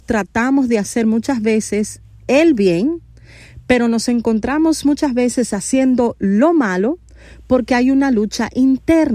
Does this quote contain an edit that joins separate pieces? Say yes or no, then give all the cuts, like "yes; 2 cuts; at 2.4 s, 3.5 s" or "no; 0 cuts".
no; 0 cuts